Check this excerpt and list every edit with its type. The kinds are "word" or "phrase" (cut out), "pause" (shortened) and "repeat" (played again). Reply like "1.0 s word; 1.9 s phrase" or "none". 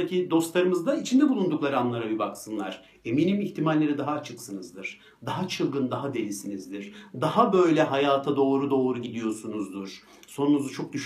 none